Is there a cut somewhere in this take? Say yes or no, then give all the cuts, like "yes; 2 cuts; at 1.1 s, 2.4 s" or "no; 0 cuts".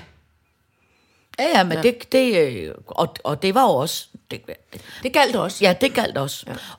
no; 0 cuts